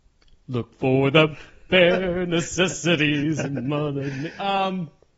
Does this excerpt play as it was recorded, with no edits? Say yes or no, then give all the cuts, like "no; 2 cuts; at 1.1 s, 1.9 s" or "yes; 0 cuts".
yes; 0 cuts